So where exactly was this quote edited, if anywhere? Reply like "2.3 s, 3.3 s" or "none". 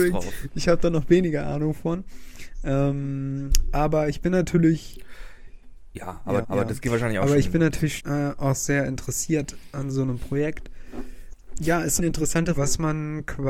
6.4 s, 8.0 s, 12.0 s, 12.5 s